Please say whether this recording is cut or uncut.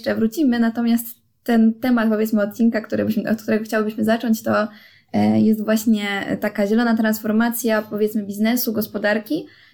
uncut